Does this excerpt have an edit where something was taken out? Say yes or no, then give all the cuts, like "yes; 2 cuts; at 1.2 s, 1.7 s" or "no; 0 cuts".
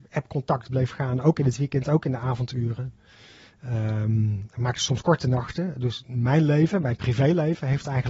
no; 0 cuts